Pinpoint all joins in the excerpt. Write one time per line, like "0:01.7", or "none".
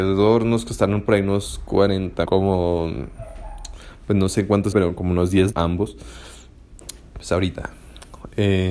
0:02.3
0:04.7
0:05.5